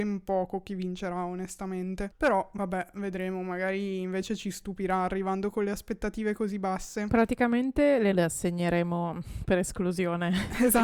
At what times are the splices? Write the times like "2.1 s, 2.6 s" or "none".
8.1 s